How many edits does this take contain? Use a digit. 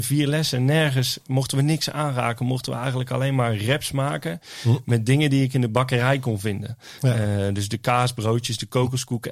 0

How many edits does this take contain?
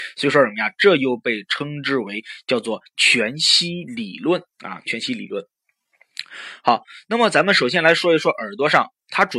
1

